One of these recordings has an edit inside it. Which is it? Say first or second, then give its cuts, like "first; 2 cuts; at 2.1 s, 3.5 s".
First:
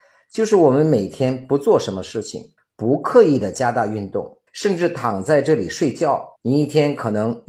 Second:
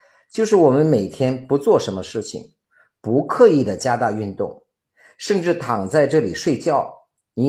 first; 3 cuts; at 2.6 s, 4.5 s, 6.4 s